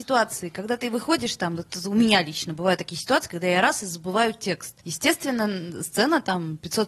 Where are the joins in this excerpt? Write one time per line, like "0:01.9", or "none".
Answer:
0:04.8